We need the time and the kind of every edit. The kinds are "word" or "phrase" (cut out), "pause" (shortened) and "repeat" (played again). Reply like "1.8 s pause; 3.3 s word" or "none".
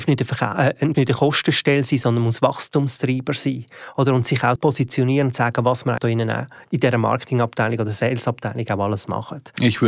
0.9 s word; 4.6 s word; 6.0 s word